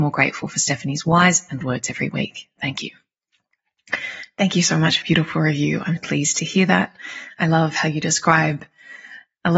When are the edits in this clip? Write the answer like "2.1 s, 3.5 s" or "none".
1.6 s, 5.0 s, 6.0 s